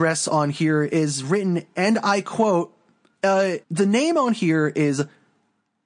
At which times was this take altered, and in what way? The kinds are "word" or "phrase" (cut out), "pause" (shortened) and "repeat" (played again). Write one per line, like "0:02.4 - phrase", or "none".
0:03.6 - pause